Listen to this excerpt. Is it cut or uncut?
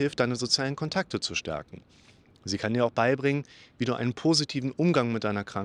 uncut